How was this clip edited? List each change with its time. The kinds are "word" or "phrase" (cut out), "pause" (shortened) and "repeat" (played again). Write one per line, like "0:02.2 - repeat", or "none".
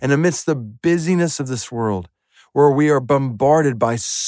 none